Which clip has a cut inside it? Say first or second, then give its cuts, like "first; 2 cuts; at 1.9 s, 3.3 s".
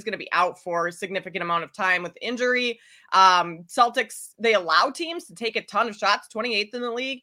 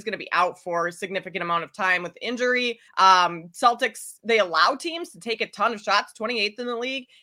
second; 1 cut; at 2.9 s